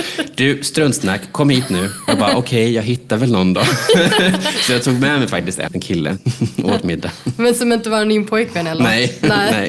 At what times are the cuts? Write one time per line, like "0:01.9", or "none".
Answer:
0:05.7